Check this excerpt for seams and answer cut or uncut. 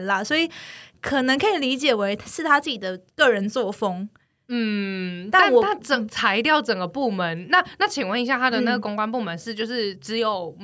uncut